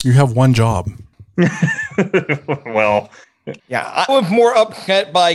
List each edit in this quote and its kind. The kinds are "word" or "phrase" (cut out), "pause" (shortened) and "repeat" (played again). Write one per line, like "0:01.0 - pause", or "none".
0:03.6 - pause
0:04.1 - phrase

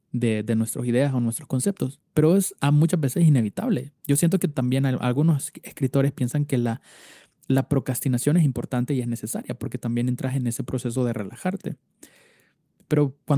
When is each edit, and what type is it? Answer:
0:04.0 - pause

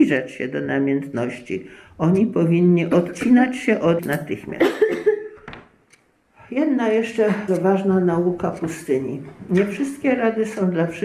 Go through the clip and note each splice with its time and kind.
0:04.0 - word
0:07.5 - word

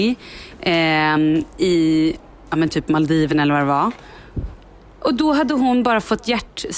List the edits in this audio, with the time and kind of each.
none

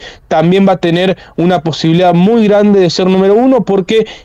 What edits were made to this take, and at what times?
none

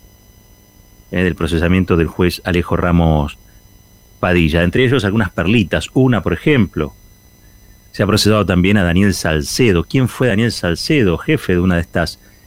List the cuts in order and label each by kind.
none

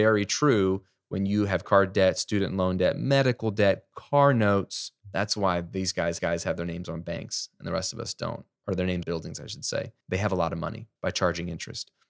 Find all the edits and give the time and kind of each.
0:01.6 - word
0:05.0 - pause
0:06.2 - repeat
0:08.6 - pause
0:09.0 - word
0:10.0 - pause
0:11.0 - pause

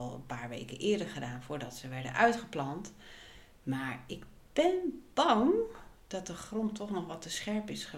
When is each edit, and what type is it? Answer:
none

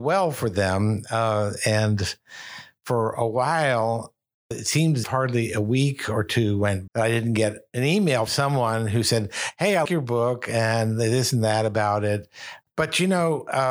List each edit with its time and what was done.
0:05.0 - word
0:06.9 - word
0:08.3 - word
0:09.8 - word

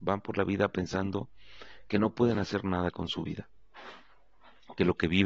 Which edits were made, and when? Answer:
none

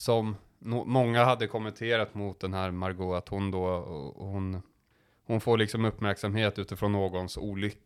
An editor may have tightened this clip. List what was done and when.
none

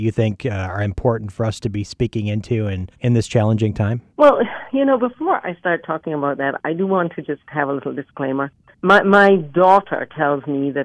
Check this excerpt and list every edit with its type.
0:02.9 - pause
0:04.1 - pause
0:08.7 - pause

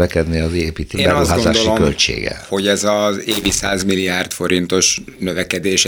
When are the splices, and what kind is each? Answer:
0:00.9 - word

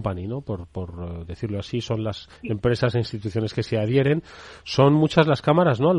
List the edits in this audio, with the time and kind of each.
0:02.4 - pause

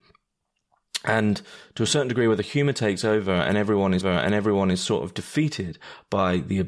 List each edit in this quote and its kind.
0:04.0 - repeat

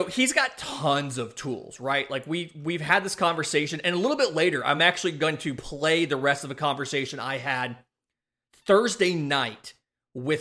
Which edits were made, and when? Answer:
none

